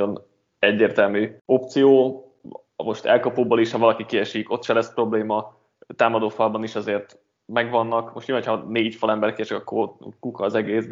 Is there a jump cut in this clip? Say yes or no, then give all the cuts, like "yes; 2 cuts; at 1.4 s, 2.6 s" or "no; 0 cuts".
yes; 1 cut; at 1.4 s